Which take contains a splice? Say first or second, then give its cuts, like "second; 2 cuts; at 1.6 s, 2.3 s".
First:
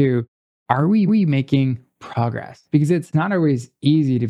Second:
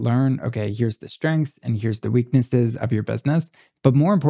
first; 2 cuts; at 1.1 s, 2.6 s